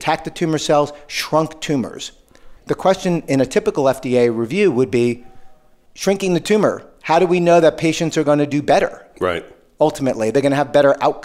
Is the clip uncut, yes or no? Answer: no